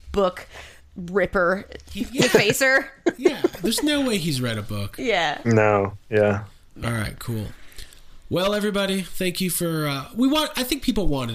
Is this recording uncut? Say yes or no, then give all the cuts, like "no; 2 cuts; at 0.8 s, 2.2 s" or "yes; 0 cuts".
yes; 0 cuts